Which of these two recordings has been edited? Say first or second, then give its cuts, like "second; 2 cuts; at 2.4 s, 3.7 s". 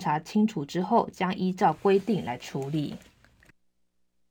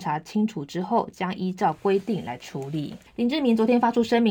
second; 1 cut; at 3.1 s